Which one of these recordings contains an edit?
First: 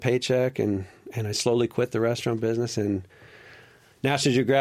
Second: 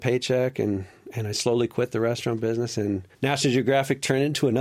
second; 1 cut; at 3.1 s

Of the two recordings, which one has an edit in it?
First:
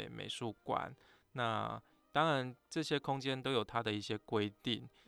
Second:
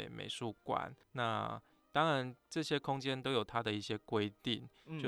second; 1 cut; at 1.0 s

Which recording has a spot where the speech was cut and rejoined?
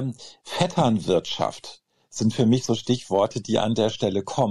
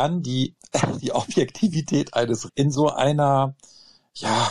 second; 1 cut; at 2.5 s

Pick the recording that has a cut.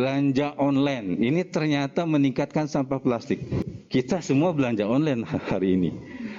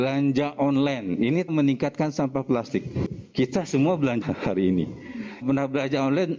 second; 3 cuts; at 1.5 s, 4.2 s, 5.4 s

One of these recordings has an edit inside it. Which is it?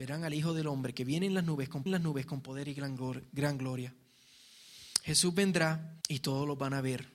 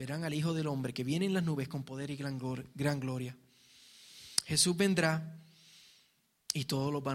first; 2 cuts; at 1.9 s, 6.0 s

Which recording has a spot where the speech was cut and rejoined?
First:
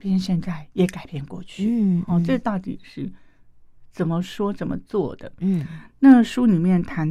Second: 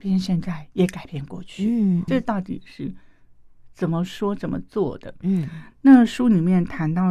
second; 1 cut; at 2.1 s

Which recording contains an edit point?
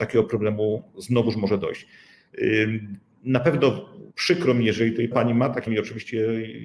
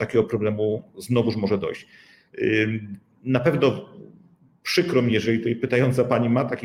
first; 3 cuts; at 4.1 s, 5.1 s, 5.7 s

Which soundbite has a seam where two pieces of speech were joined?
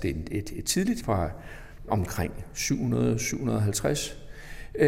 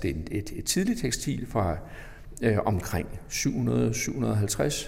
first; 2 cuts; at 1.0 s, 1.9 s

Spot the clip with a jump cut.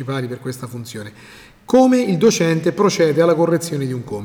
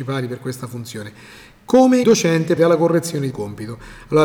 second; 3 cuts; at 2.0 s, 2.6 s, 3.3 s

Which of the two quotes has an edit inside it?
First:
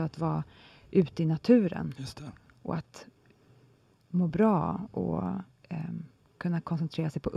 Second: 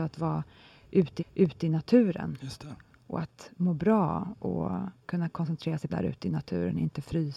second; 4 cuts; at 1.2 s, 3.5 s, 5.0 s, 5.9 s

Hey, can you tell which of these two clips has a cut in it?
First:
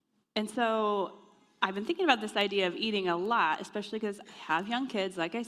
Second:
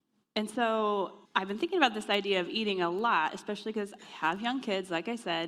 second; 1 cut; at 1.3 s

